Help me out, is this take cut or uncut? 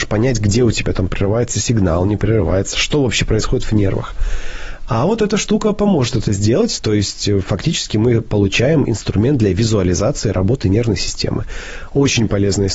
uncut